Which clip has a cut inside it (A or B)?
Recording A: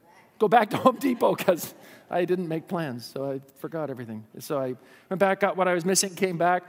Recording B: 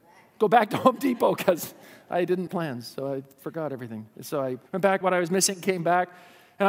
B